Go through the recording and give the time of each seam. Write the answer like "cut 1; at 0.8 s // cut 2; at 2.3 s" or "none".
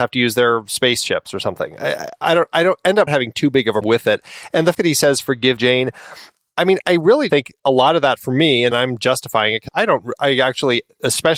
cut 1; at 3.1 s // cut 2; at 3.8 s // cut 3; at 4.7 s // cut 4; at 5.6 s // cut 5; at 7.3 s // cut 6; at 8.7 s // cut 7; at 9.7 s // cut 8; at 10.2 s